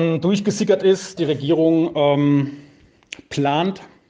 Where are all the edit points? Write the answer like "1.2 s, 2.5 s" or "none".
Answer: 1.2 s